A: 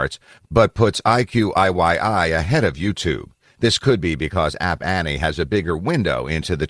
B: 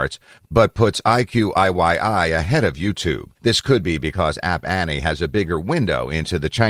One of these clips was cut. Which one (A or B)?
B